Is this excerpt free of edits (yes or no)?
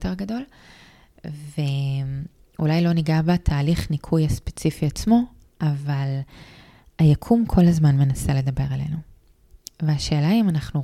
yes